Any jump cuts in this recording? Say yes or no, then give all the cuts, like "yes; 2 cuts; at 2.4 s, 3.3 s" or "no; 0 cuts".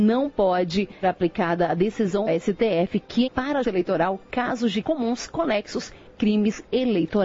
yes; 6 cuts; at 1.0 s, 2.3 s, 3.3 s, 3.6 s, 4.8 s, 6.1 s